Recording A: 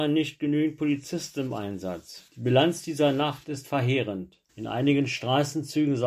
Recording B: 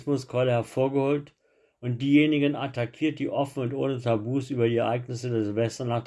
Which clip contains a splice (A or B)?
A